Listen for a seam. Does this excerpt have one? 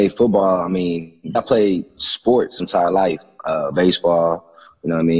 yes; 3 cuts; at 1.3 s, 2.6 s, 3.7 s

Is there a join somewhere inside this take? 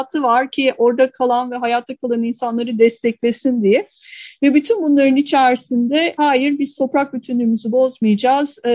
no; 0 cuts

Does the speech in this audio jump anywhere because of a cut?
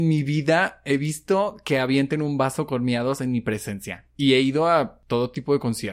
no; 0 cuts

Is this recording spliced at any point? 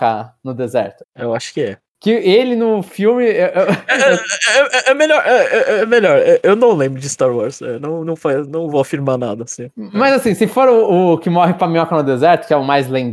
no; 0 cuts

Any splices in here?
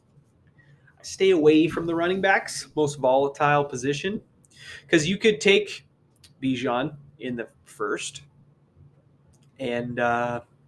no; 0 cuts

